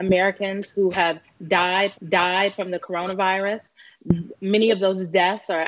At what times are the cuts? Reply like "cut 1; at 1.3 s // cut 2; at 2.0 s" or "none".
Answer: cut 1; at 1.9 s